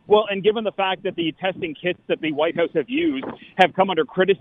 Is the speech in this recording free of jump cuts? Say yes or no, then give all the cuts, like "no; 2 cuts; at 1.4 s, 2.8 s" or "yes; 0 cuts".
yes; 0 cuts